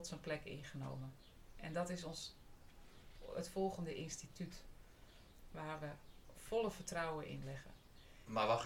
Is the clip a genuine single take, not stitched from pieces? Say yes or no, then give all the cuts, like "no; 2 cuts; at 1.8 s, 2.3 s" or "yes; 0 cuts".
no; 1 cut; at 6.3 s